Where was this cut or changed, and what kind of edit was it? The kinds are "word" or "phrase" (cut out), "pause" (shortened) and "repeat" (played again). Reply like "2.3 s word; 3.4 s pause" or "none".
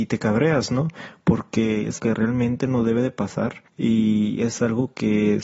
2.0 s word; 3.7 s pause

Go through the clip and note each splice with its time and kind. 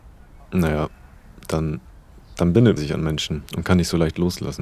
2.1 s pause; 2.8 s word; 3.5 s pause

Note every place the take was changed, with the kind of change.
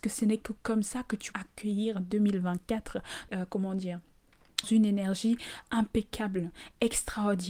1.3 s word; 3.3 s phrase; 4.6 s word; 5.6 s word

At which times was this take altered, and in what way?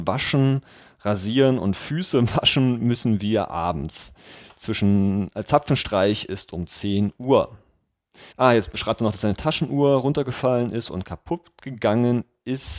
8.3 s pause

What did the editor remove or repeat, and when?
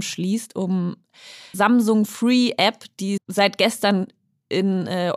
1.5 s word; 3.2 s word

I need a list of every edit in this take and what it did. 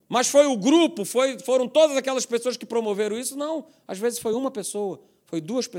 none

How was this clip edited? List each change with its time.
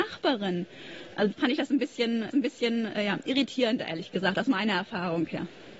1.3 s word; 2.3 s repeat

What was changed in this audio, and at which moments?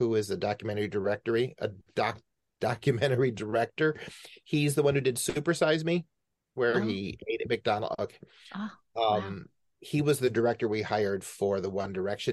none

